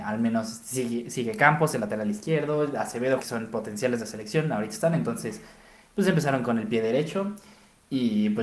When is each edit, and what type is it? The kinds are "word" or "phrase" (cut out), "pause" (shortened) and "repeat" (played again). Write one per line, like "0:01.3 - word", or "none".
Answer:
0:03.2 - word